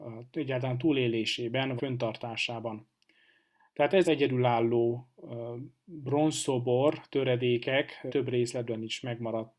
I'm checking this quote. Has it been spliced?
yes; 3 cuts; at 1.8 s, 4.0 s, 8.1 s

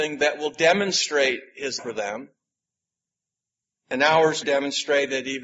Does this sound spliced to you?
yes; 2 cuts; at 1.8 s, 4.4 s

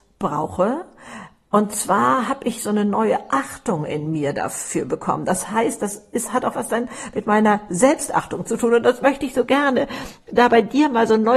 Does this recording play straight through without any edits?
yes; 0 cuts

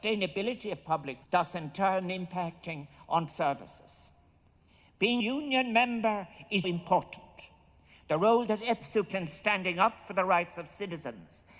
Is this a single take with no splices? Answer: no; 5 cuts; at 1.2 s, 3.3 s, 5.2 s, 6.6 s, 9.1 s

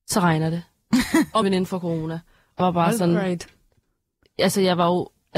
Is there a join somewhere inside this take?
yes; 2 cuts; at 1.4 s, 2.6 s

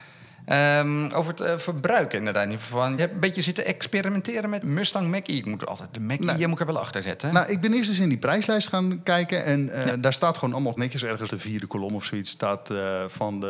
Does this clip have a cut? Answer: yes; 4 cuts; at 3.0 s, 4.6 s, 10.8 s, 11.3 s

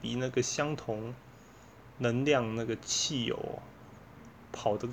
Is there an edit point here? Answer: no; 0 cuts

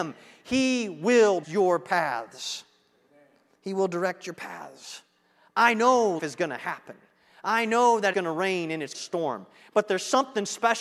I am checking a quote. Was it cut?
yes; 4 cuts; at 1.4 s, 6.2 s, 8.1 s, 8.9 s

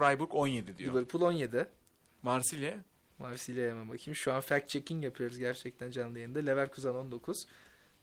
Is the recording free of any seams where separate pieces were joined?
yes; 0 cuts

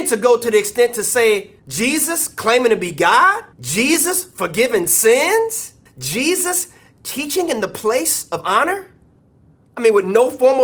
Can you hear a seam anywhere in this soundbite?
yes; 3 cuts; at 1.6 s, 3.5 s, 5.9 s

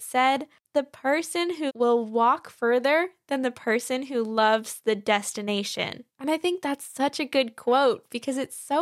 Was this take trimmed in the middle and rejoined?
yes; 2 cuts; at 1.7 s, 6.1 s

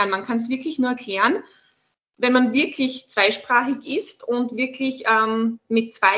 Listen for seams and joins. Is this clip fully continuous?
yes; 0 cuts

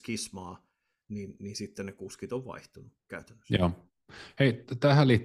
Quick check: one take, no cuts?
yes; 0 cuts

